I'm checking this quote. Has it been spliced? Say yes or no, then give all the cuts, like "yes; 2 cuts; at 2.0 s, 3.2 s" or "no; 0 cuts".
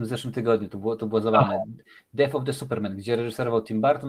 no; 0 cuts